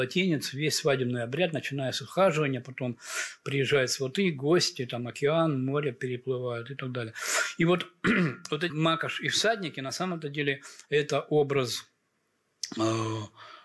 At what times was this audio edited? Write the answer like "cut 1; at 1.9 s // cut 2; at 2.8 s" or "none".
cut 1; at 8.7 s